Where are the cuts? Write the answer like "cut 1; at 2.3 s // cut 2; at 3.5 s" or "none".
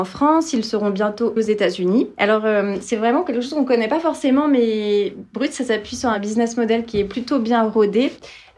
cut 1; at 1.4 s